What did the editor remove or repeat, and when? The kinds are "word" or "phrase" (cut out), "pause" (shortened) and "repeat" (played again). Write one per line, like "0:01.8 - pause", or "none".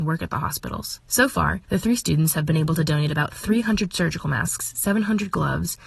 0:01.0 - pause
0:01.6 - pause